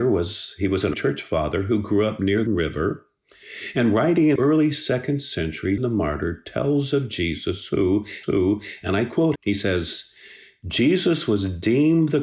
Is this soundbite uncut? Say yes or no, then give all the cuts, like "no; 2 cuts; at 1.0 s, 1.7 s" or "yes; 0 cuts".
no; 6 cuts; at 0.9 s, 2.5 s, 4.4 s, 5.8 s, 8.2 s, 9.4 s